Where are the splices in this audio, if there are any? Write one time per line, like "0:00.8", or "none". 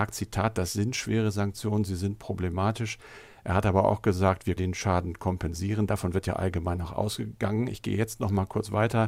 0:04.6